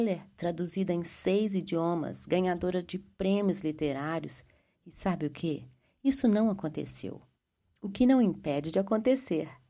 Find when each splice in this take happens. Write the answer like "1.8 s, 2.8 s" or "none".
none